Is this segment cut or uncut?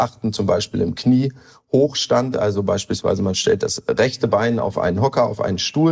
uncut